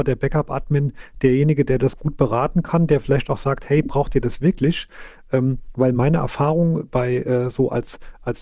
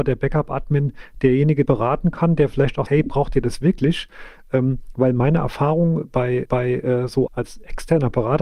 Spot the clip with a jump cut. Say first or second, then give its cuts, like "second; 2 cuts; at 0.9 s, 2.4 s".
second; 4 cuts; at 1.7 s, 2.9 s, 6.5 s, 7.3 s